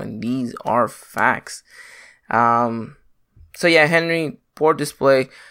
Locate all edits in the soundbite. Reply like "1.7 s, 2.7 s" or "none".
none